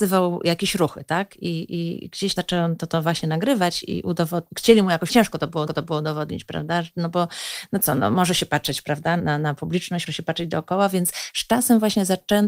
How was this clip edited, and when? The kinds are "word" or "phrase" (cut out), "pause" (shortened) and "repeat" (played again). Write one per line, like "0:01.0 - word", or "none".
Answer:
0:02.4 - word
0:04.5 - pause
0:05.1 - phrase
0:05.7 - repeat
0:09.2 - word
0:10.1 - word